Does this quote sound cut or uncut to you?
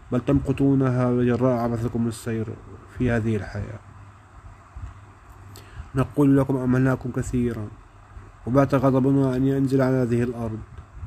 uncut